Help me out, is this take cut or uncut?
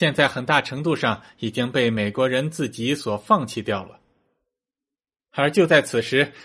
uncut